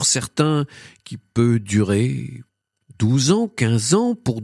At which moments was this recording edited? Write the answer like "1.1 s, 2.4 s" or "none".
none